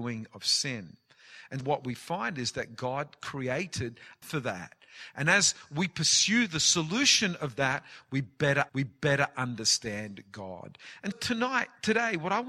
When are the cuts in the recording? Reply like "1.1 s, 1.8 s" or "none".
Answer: 1.6 s, 4.2 s, 8.7 s, 11.1 s